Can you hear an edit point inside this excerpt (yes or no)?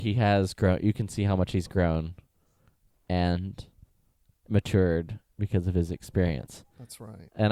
no